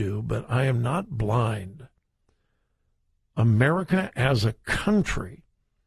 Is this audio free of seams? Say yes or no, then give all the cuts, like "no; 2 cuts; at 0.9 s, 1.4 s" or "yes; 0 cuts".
yes; 0 cuts